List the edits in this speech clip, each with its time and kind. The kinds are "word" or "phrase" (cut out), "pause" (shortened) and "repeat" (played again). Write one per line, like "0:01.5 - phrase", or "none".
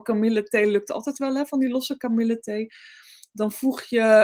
none